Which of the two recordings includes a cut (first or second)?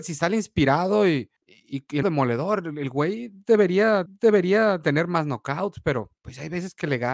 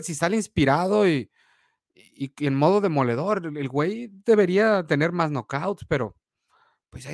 first